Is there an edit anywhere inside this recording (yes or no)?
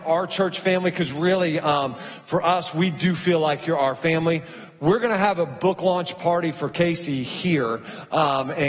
no